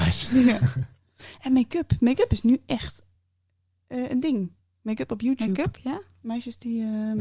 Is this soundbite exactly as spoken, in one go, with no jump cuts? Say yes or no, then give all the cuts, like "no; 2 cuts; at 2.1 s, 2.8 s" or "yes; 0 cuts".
yes; 0 cuts